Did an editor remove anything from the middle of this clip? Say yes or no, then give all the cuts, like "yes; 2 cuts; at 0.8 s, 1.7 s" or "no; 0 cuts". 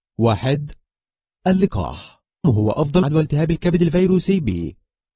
yes; 2 cuts; at 2.4 s, 3.0 s